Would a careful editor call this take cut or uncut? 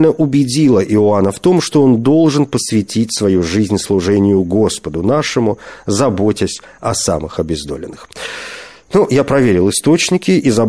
uncut